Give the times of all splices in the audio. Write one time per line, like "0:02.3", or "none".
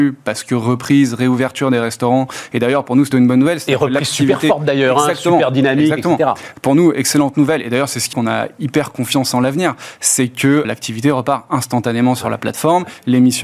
0:03.1
0:08.1
0:10.6